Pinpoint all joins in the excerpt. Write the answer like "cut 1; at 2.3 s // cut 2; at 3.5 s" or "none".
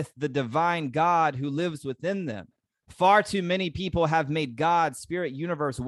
cut 1; at 2.7 s